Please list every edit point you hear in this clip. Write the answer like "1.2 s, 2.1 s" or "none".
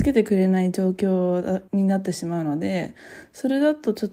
1.7 s